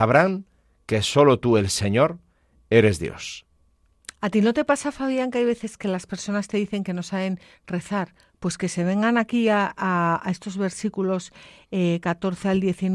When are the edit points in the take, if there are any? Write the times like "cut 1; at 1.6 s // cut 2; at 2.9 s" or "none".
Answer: none